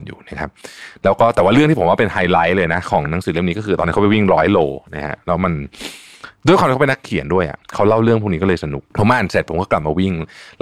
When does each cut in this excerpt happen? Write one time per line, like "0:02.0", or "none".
0:07.6
0:08.9

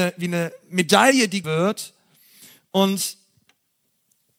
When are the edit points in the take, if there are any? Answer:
0:01.4

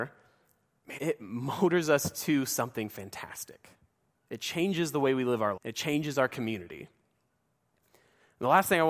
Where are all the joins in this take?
0:01.0
0:05.6

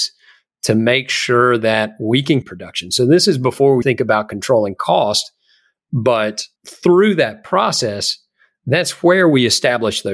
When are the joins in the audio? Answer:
0:02.4
0:03.8
0:06.6

